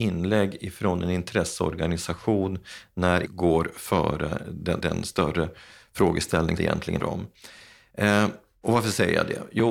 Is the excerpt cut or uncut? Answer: cut